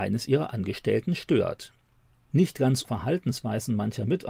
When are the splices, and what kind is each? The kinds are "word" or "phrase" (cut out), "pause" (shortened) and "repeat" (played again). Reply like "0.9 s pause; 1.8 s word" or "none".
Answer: 2.8 s word